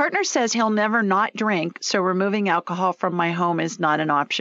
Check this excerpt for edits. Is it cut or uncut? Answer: uncut